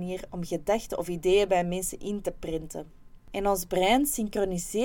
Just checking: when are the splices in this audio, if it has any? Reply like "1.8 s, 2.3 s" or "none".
none